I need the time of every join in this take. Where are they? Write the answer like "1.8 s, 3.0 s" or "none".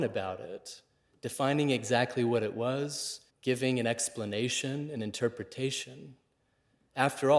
3.3 s